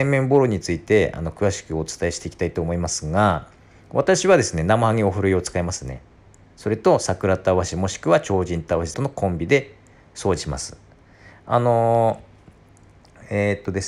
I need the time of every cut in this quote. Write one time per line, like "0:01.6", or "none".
0:08.9